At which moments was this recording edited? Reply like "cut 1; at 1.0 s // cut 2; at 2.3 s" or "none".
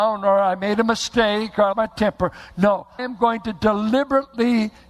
cut 1; at 1.7 s // cut 2; at 3.0 s